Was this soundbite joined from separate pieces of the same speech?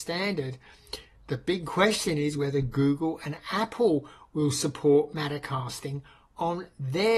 no; 0 cuts

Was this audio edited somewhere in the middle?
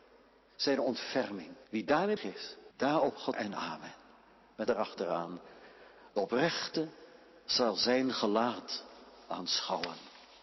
yes; 5 cuts; at 1.6 s, 2.2 s, 2.7 s, 3.3 s, 4.7 s

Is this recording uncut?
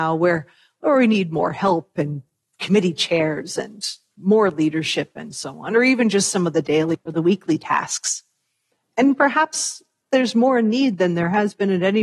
yes; 0 cuts

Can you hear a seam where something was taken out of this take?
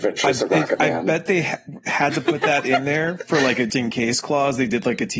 yes; 1 cut; at 3.7 s

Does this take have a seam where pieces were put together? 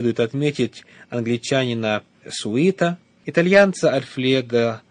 yes; 1 cut; at 2.2 s

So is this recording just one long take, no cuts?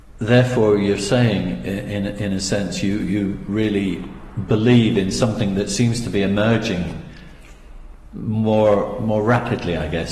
yes; 0 cuts

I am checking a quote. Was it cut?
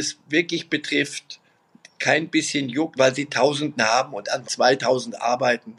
yes; 3 cuts; at 3.0 s, 3.7 s, 4.4 s

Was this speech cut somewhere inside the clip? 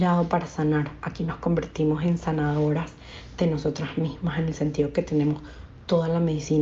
no; 0 cuts

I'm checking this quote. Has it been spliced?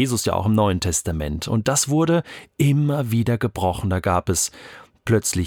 no; 0 cuts

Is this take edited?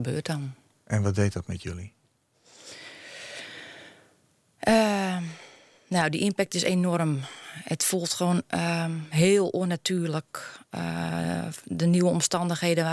no; 0 cuts

